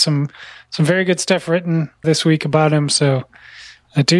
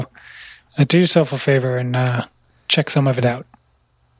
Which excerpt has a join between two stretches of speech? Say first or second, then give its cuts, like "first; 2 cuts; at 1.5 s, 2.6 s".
first; 1 cut; at 2.0 s